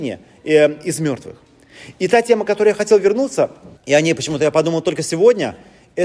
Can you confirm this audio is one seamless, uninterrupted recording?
no; 1 cut; at 3.8 s

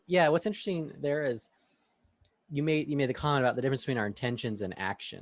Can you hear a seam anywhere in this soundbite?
no; 0 cuts

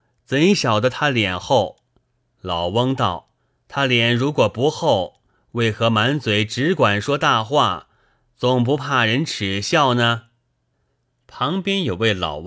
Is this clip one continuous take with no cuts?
no; 1 cut; at 3.4 s

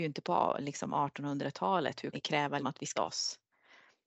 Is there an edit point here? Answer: yes; 3 cuts; at 2.1 s, 2.6 s, 3.0 s

